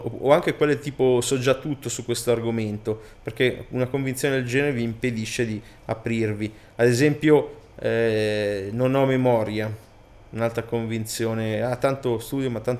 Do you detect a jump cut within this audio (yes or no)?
no